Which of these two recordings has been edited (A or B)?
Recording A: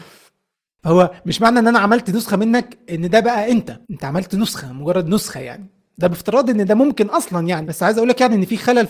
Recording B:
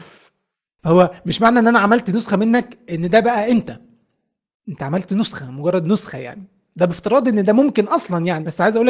A